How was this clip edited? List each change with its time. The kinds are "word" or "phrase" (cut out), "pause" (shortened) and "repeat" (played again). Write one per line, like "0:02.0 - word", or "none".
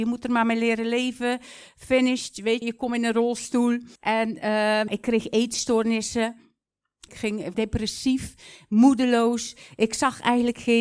0:02.6 - word
0:04.0 - pause
0:04.9 - word
0:07.1 - phrase
0:07.5 - word